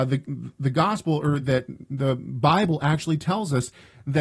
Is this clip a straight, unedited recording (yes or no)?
yes